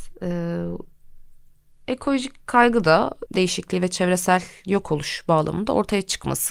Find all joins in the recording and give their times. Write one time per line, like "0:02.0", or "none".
0:03.3

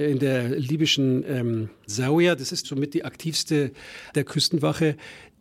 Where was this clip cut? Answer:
0:01.9
0:02.6
0:04.1

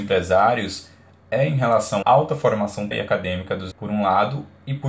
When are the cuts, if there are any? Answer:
0:02.0
0:02.9
0:03.7

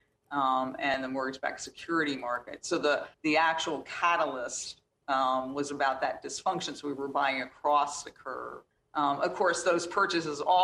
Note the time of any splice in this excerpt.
0:03.1
0:08.7

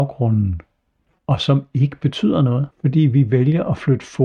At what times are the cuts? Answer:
0:02.7

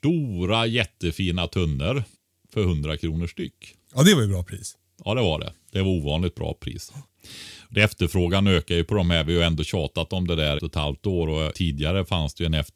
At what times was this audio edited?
0:02.1
0:10.6
0:11.5

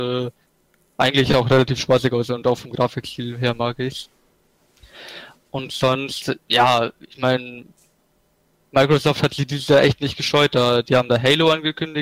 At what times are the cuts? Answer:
none

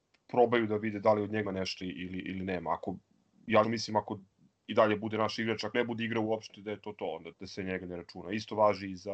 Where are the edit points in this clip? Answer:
0:01.4
0:01.8
0:03.6
0:05.7
0:07.3

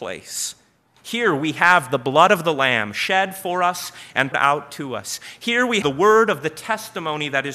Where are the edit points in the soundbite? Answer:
0:04.3
0:05.8

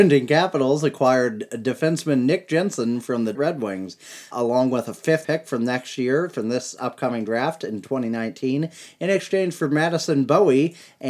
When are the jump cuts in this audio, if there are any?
0:03.3
0:04.3
0:05.2

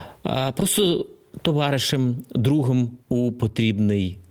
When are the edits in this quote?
0:03.0

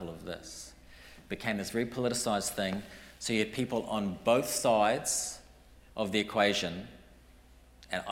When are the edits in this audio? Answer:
0:05.9

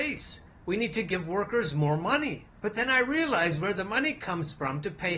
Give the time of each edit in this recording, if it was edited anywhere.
0:02.6

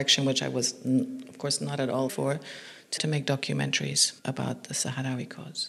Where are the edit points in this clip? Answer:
0:02.1
0:03.0
0:04.2

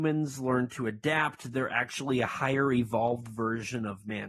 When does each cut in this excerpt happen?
none

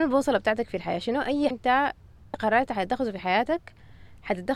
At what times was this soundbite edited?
0:01.5
0:02.3

